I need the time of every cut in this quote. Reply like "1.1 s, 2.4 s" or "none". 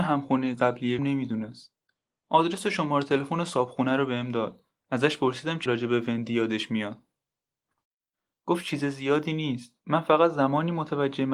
1.0 s, 5.7 s